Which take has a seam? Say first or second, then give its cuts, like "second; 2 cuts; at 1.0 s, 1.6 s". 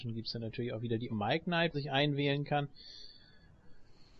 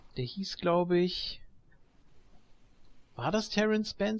first; 2 cuts; at 1.1 s, 1.7 s